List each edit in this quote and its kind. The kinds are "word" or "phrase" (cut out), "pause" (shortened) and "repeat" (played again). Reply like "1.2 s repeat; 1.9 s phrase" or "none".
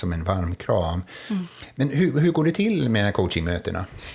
none